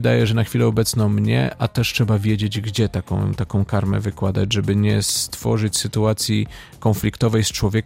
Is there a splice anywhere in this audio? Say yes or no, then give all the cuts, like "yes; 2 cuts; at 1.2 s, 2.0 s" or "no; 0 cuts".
no; 0 cuts